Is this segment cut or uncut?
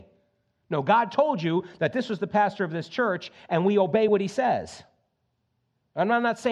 uncut